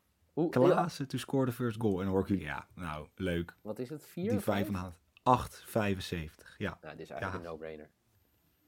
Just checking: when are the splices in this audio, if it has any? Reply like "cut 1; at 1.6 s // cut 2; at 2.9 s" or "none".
cut 1; at 2.4 s